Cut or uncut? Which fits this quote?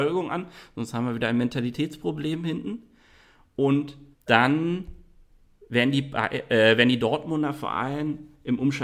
cut